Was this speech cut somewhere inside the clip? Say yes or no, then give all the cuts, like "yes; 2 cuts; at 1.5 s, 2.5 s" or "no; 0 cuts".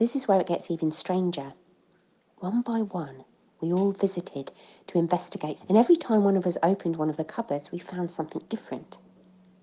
yes; 1 cut; at 5.6 s